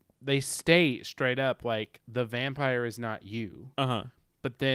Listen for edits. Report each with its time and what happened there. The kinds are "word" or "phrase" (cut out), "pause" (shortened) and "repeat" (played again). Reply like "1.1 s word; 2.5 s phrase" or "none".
3.7 s pause